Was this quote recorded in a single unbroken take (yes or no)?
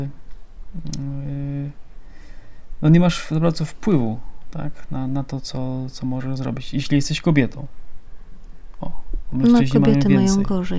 yes